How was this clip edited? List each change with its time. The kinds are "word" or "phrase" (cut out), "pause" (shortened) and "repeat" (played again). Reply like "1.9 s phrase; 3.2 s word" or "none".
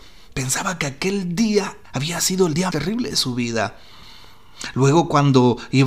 1.8 s pause; 2.7 s word